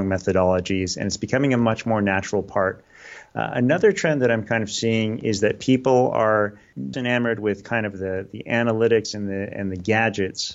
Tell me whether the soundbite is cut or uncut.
cut